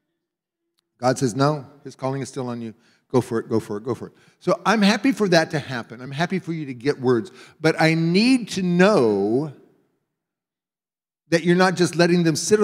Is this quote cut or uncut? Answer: uncut